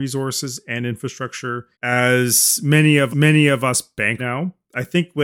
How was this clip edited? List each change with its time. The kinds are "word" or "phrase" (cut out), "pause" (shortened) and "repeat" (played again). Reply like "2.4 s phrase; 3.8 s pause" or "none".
1.7 s pause; 3.1 s repeat; 4.2 s word